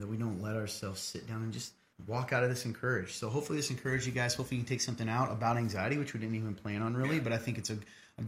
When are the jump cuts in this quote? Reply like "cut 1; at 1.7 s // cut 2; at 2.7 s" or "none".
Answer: cut 1; at 1.9 s